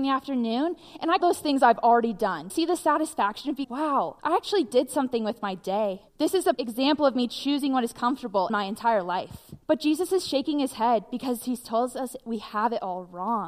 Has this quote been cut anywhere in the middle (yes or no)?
yes